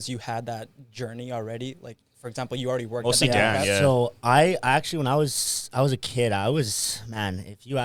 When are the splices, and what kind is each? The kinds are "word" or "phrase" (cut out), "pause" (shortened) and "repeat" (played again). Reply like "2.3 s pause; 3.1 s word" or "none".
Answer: none